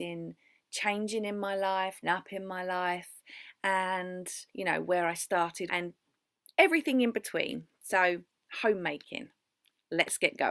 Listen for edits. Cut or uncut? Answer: cut